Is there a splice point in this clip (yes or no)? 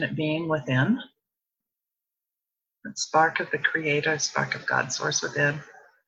no